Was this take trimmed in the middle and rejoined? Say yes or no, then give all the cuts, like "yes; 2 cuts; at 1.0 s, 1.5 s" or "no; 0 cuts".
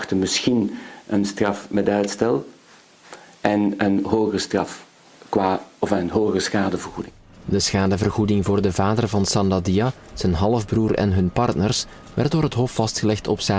no; 0 cuts